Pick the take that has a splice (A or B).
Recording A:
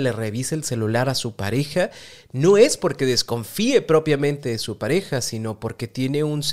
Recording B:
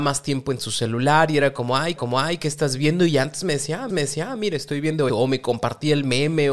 B